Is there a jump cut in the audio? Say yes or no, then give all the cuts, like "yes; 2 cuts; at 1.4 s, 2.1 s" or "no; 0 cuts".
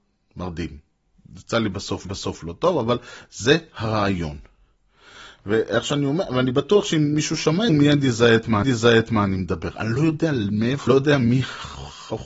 yes; 5 cuts; at 1.1 s, 2.0 s, 7.7 s, 8.6 s, 10.9 s